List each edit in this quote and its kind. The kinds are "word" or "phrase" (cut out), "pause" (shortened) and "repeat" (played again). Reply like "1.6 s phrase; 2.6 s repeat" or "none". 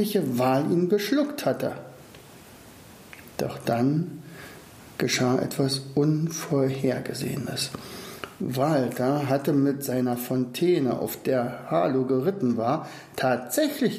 none